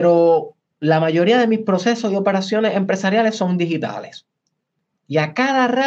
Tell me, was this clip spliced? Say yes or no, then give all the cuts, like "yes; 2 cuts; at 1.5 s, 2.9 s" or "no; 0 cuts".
no; 0 cuts